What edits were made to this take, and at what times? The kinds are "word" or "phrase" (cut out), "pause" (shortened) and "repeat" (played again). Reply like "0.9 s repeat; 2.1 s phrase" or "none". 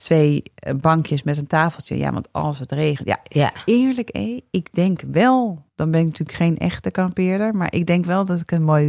5.7 s pause